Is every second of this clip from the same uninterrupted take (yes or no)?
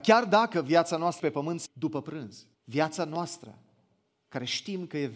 no